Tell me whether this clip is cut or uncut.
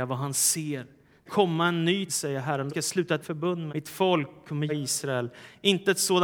cut